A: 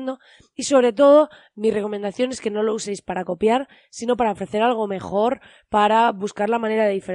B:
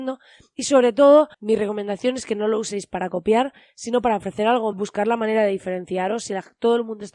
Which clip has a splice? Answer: B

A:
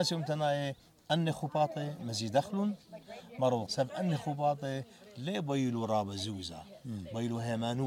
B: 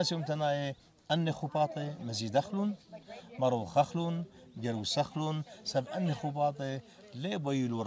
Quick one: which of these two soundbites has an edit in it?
A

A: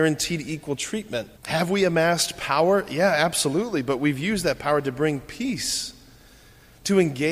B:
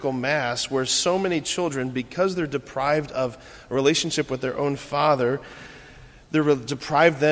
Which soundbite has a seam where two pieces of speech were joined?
A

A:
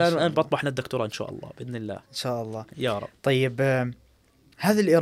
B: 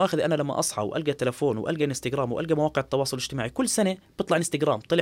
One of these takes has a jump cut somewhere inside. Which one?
A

